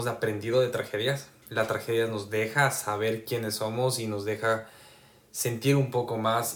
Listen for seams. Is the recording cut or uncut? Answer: uncut